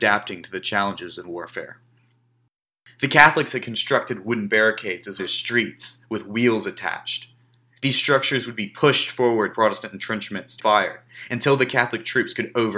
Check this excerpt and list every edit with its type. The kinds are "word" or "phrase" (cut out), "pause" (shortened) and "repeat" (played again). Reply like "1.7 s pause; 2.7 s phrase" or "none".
1.2 s word; 5.2 s word; 9.5 s word; 10.6 s word